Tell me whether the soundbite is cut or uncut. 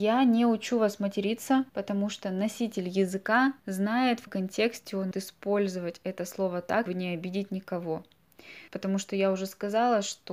cut